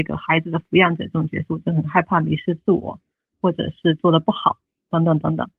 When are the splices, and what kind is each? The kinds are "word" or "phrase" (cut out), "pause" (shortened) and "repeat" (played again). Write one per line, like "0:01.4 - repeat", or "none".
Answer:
none